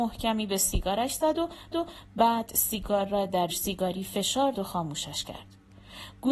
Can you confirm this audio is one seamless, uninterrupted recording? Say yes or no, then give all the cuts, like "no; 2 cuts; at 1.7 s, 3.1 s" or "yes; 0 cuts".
no; 3 cuts; at 1.7 s, 3.5 s, 4.5 s